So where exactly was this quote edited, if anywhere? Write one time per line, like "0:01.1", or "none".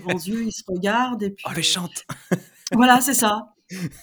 0:01.5